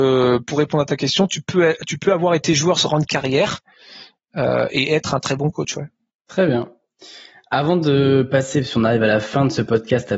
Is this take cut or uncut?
cut